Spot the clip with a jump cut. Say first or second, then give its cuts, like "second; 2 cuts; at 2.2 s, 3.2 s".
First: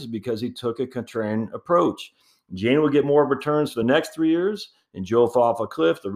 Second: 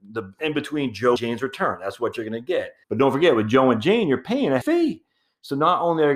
second; 3 cuts; at 1.2 s, 2.8 s, 4.6 s